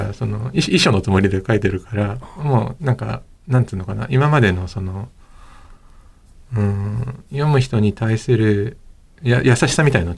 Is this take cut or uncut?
uncut